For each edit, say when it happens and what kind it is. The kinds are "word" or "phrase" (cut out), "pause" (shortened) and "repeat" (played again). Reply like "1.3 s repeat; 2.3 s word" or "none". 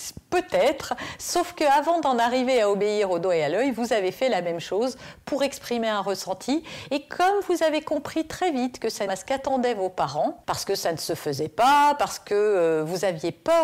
9.1 s phrase